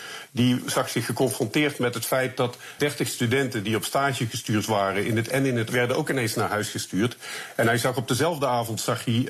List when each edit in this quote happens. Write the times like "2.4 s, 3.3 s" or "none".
2.8 s, 5.3 s, 5.7 s